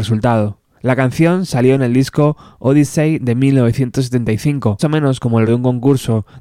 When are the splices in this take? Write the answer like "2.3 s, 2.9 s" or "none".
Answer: 4.8 s, 5.5 s

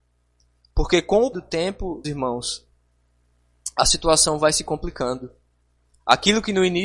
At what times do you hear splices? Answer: 1.3 s, 2.0 s

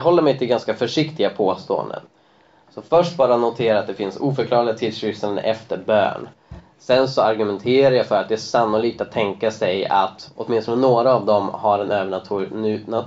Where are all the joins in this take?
none

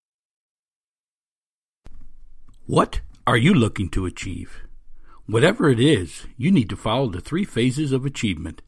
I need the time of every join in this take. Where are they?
none

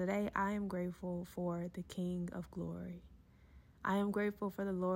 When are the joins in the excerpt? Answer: none

